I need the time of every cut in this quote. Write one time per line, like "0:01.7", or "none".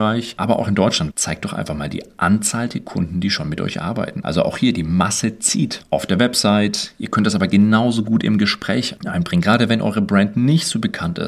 0:01.1